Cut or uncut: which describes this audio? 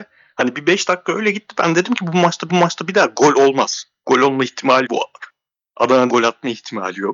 cut